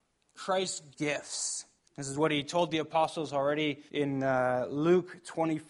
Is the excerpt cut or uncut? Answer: cut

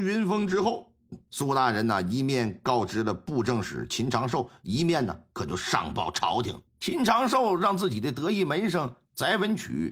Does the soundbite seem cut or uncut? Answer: cut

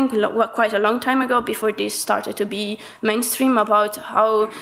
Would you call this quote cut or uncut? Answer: uncut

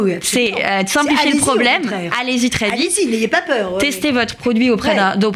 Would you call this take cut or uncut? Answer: uncut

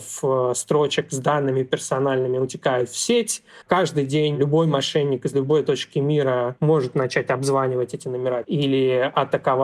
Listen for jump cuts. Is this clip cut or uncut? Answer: cut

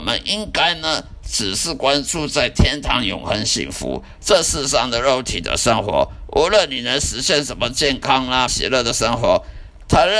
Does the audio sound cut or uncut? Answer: cut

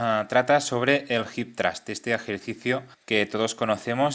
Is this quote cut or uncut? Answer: cut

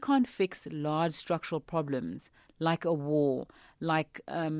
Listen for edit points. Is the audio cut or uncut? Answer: uncut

